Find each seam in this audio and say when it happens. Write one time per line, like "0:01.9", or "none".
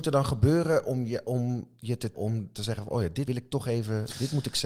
0:02.1
0:03.3